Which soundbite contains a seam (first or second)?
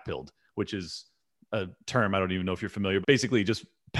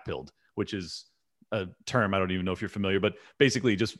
first